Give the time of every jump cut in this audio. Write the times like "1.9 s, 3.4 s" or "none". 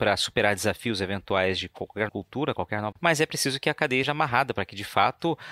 2.1 s, 2.9 s, 4.0 s